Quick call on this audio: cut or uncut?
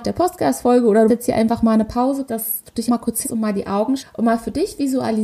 cut